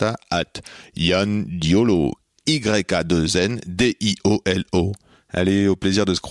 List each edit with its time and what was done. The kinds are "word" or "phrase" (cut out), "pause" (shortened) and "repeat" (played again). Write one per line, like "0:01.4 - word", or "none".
none